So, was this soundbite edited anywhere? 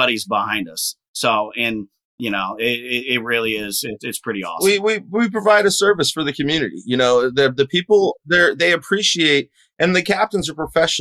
no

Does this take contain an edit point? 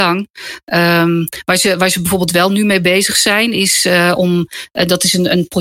no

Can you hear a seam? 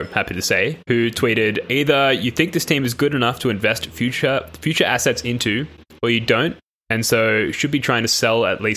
no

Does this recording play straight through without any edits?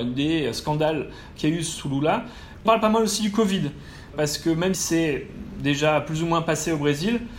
no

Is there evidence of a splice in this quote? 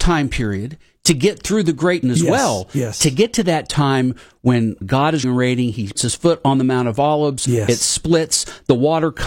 yes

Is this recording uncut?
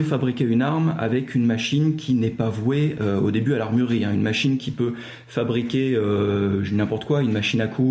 yes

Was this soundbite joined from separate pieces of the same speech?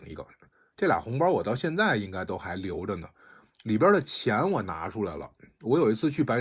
no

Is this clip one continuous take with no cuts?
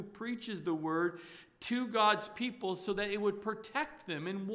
yes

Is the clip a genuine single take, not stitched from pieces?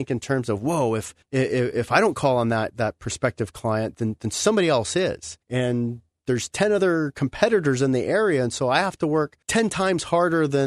no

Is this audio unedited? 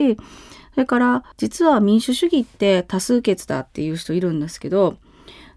no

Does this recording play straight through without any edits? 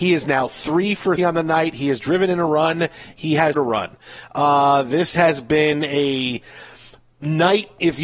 no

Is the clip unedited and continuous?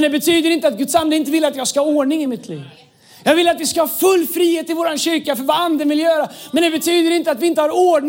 yes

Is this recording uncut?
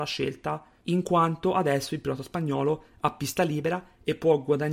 yes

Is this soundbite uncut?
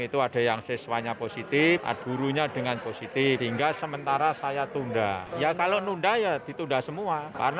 no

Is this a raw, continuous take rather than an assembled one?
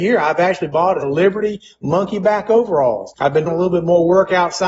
no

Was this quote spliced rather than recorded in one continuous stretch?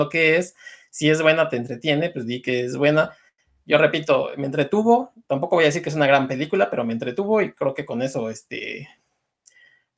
no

